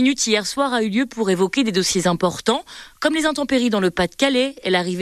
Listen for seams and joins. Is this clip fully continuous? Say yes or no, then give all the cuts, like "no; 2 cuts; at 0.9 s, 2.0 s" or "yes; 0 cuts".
yes; 0 cuts